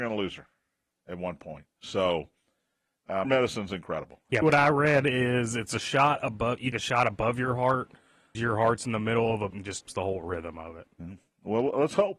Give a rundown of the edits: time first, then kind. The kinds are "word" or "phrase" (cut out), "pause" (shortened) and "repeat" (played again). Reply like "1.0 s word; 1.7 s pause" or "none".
3.2 s word; 4.4 s word; 6.7 s word; 8.3 s word; 9.5 s word; 9.8 s word

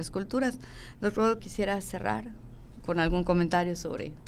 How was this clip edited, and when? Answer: 1.4 s word; 2.8 s word

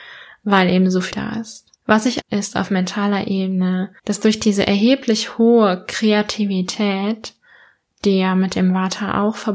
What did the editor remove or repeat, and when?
1.1 s word; 1.7 s pause; 2.2 s phrase; 4.0 s pause

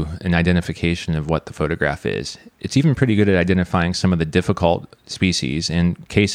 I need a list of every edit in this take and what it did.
5.0 s pause

